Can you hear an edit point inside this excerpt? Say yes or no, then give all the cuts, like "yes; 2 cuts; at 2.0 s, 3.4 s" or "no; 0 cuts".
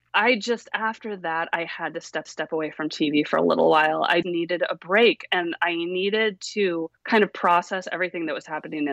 yes; 3 cuts; at 2.3 s, 4.2 s, 7.0 s